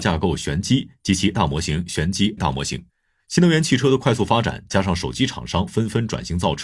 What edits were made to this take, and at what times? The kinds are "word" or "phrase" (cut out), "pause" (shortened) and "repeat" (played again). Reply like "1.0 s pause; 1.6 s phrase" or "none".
1.3 s word; 2.4 s word; 2.9 s pause